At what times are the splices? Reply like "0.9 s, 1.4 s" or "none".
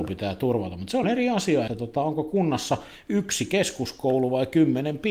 1.0 s, 1.7 s